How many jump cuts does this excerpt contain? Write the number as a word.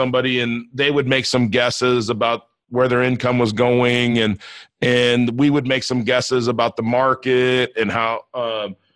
zero